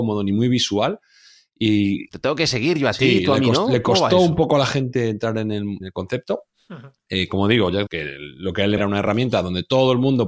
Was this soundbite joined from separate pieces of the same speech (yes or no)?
yes